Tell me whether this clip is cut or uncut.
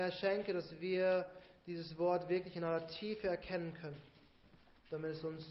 uncut